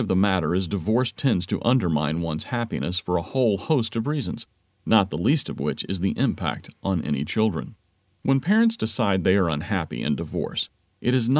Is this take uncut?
yes; 0 cuts

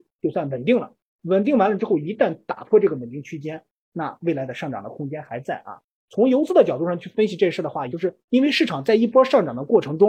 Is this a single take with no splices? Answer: no; 2 cuts; at 7.9 s, 8.2 s

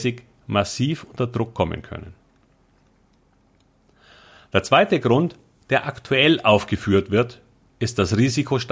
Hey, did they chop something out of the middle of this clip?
no; 0 cuts

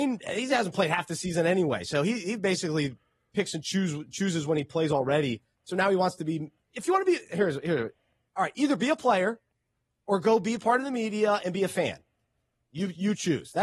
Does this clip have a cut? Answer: no; 0 cuts

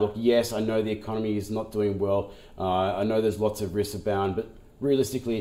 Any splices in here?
no; 0 cuts

